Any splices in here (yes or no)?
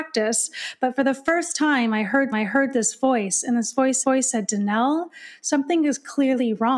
yes